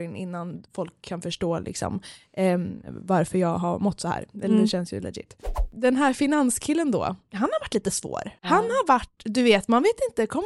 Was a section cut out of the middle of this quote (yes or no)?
yes